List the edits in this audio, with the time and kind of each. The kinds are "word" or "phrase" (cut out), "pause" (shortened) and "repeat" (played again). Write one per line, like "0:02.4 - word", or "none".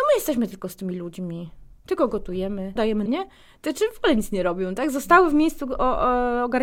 0:01.8 - pause
0:02.8 - word
0:03.1 - word

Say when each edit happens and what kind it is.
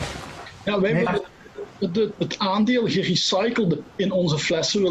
0:01.1 - word
0:02.2 - word
0:03.9 - word

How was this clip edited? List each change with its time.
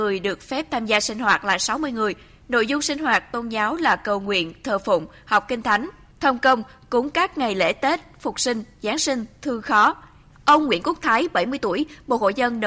none

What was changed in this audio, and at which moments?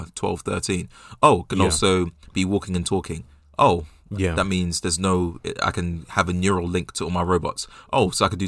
none

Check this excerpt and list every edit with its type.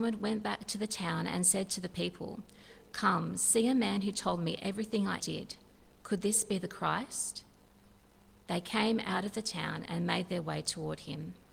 0:05.2 - word

